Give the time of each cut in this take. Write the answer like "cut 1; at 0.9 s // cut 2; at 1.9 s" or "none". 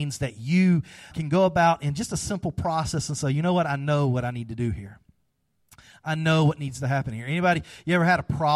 cut 1; at 1.1 s